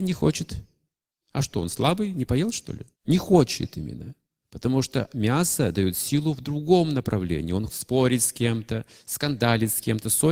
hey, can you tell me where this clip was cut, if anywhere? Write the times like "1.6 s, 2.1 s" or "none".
2.9 s, 7.7 s